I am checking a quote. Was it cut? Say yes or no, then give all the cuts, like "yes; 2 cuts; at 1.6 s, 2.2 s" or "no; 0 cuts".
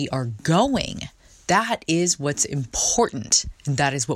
no; 0 cuts